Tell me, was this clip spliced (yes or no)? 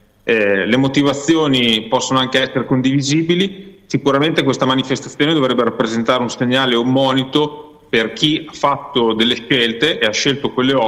no